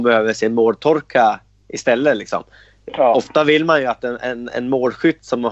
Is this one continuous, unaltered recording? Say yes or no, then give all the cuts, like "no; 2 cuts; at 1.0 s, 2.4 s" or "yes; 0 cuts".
yes; 0 cuts